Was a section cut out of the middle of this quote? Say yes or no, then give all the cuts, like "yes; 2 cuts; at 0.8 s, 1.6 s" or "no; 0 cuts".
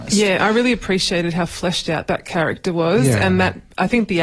no; 0 cuts